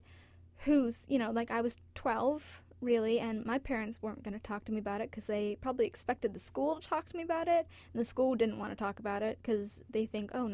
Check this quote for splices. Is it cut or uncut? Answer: uncut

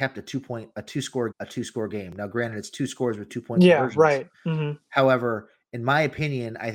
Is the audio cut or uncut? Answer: cut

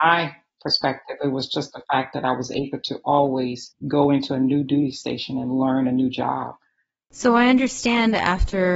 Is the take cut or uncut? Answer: uncut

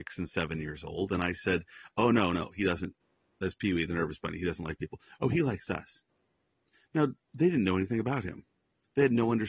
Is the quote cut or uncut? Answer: uncut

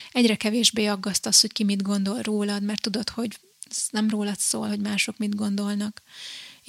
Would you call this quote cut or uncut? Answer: uncut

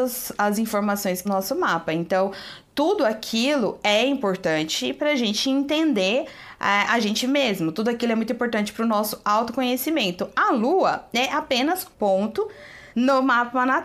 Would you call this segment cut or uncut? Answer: cut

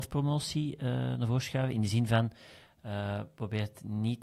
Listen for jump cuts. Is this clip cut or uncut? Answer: uncut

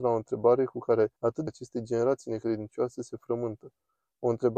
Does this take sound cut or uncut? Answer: cut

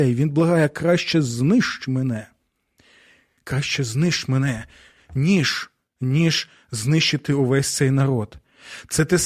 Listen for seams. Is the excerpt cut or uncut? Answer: uncut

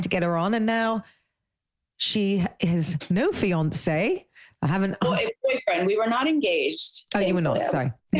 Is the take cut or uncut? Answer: uncut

